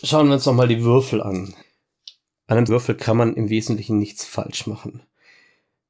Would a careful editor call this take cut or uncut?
cut